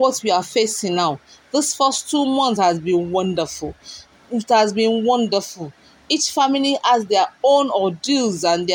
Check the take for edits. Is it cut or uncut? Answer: uncut